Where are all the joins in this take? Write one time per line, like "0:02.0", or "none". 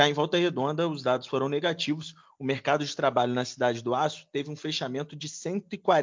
none